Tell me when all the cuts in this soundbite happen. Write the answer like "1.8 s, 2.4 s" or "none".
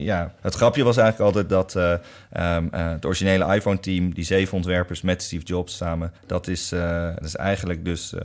6.2 s, 7.2 s